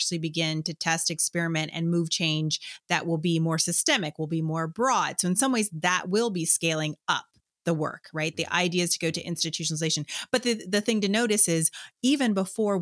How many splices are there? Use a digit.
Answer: 0